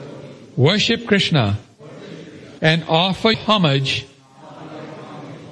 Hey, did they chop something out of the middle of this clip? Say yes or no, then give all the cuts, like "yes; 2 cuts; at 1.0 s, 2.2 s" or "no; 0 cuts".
yes; 2 cuts; at 2.6 s, 3.3 s